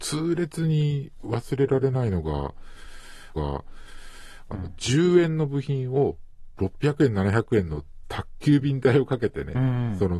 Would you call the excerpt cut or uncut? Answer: cut